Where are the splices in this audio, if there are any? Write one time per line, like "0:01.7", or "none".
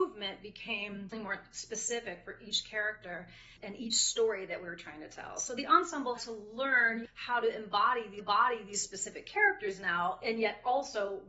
0:01.1
0:06.2
0:08.2